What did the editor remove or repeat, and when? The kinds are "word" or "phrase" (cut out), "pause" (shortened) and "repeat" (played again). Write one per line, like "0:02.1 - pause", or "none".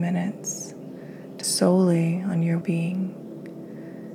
0:01.4 - word
0:02.6 - word